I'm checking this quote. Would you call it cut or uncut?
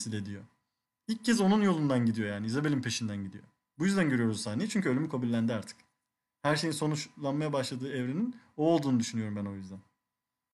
uncut